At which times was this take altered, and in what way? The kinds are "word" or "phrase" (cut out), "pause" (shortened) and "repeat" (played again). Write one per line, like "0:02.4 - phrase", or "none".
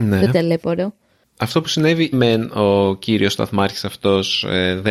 0:02.1 - phrase